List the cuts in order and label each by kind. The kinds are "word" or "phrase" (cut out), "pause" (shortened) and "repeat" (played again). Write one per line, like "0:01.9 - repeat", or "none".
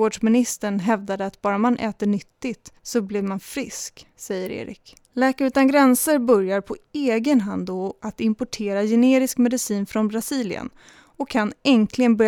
0:02.8 - pause
0:04.1 - pause
0:05.0 - pause